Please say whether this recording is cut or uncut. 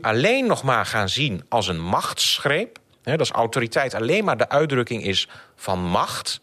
uncut